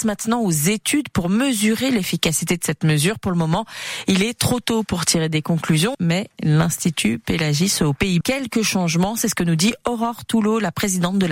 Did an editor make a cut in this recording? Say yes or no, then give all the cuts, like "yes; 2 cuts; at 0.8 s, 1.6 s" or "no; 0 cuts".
yes; 2 cuts; at 5.9 s, 8.2 s